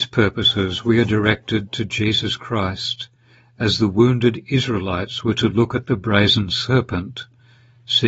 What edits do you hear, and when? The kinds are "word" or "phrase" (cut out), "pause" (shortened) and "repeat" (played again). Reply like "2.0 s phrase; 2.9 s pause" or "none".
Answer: none